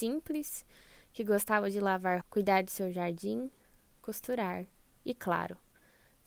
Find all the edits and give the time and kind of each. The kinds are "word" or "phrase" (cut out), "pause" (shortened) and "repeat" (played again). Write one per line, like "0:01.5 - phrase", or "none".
0:02.2 - word